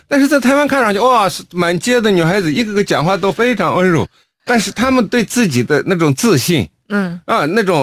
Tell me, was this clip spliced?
no; 0 cuts

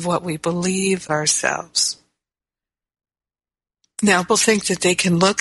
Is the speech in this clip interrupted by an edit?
yes; 2 cuts; at 1.1 s, 4.3 s

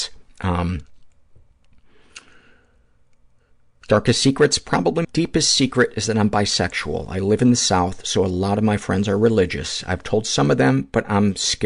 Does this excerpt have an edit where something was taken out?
yes; 1 cut; at 5.0 s

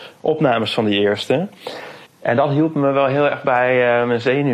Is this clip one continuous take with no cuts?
no; 1 cut; at 2.1 s

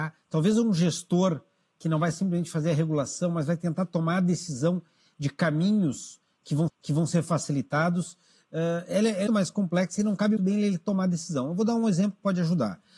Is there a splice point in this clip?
yes; 3 cuts; at 6.7 s, 9.3 s, 10.4 s

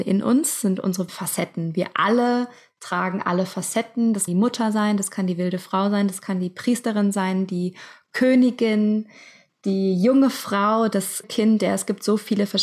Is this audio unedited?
no; 3 cuts; at 1.1 s, 4.3 s, 11.2 s

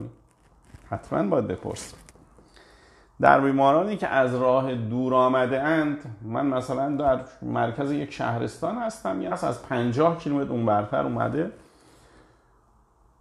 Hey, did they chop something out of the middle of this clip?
yes; 1 cut; at 9.3 s

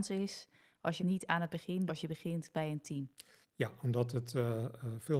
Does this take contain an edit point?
yes; 3 cuts; at 1.0 s, 1.9 s, 3.4 s

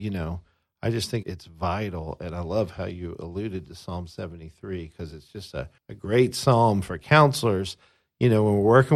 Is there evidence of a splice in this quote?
yes; 2 cuts; at 1.2 s, 5.8 s

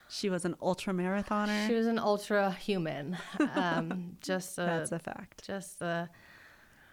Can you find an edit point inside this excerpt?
no; 0 cuts

